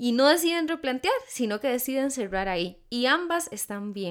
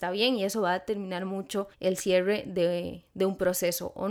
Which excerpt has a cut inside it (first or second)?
second